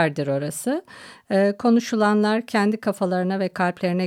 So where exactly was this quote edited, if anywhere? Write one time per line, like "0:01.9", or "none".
none